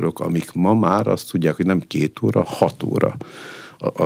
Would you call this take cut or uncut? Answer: cut